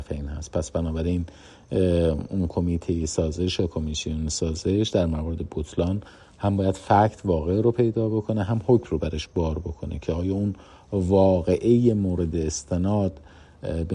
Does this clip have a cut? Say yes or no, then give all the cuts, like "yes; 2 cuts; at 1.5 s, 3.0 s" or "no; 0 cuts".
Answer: no; 0 cuts